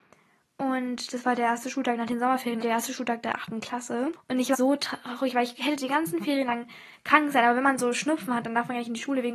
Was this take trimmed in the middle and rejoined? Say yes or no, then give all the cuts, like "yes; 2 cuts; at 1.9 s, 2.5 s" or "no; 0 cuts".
yes; 2 cuts; at 2.6 s, 4.5 s